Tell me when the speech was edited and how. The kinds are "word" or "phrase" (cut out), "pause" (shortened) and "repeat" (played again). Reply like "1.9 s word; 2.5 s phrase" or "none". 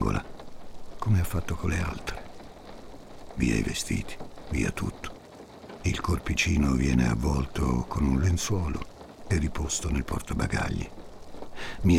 none